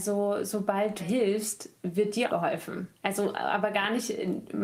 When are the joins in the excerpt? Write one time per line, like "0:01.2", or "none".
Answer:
0:01.0
0:01.8
0:02.3
0:02.9

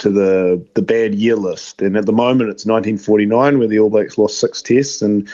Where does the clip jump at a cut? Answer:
none

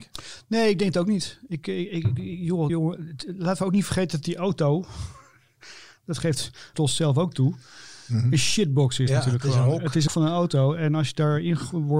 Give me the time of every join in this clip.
0:02.7
0:06.7
0:10.1

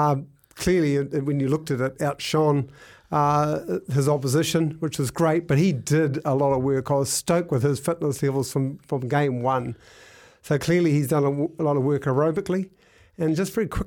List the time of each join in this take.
none

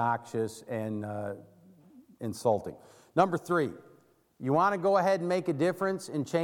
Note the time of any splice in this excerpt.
none

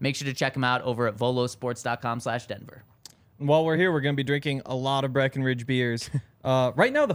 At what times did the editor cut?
none

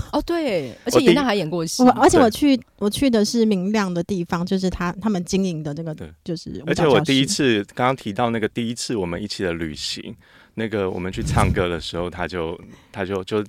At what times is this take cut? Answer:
none

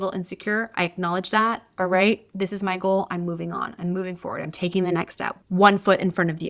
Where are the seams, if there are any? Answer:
none

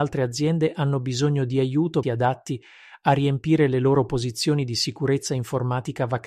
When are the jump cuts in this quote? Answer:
0:02.0

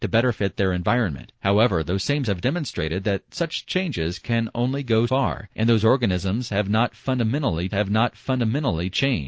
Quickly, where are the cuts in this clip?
0:01.4
0:02.2
0:05.1
0:05.5
0:07.7

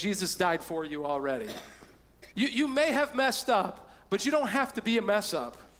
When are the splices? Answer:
0:02.3

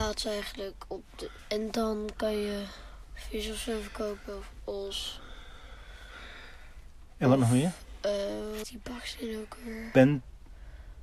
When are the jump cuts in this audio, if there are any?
0:01.4
0:08.6

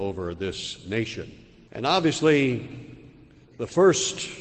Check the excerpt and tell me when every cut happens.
0:01.7

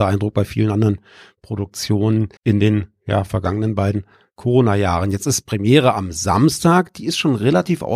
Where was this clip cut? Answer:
0:02.4

